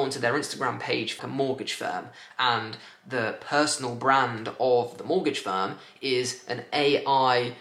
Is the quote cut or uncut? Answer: cut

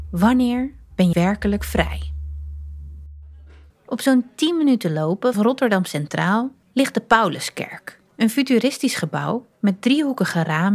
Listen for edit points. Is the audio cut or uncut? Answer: cut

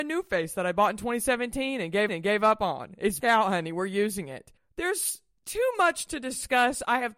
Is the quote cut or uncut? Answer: cut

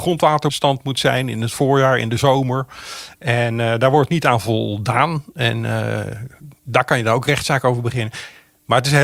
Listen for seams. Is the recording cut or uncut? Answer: uncut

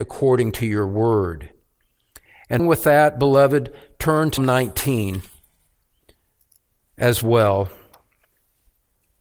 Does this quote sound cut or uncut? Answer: cut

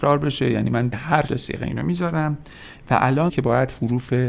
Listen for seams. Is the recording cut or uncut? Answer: cut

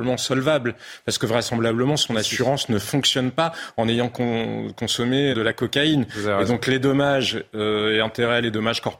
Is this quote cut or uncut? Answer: cut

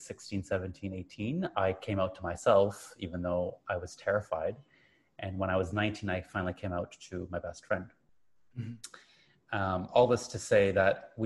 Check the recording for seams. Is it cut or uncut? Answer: uncut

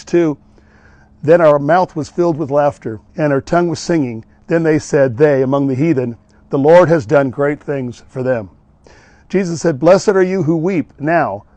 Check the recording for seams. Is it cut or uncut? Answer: cut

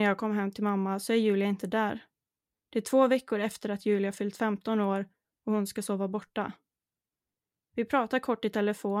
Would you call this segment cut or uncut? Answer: uncut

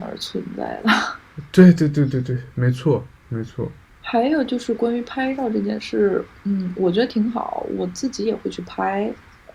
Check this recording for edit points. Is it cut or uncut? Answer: uncut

